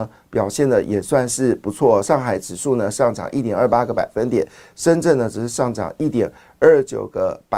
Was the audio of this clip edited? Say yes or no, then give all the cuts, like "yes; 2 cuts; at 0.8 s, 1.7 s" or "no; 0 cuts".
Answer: no; 0 cuts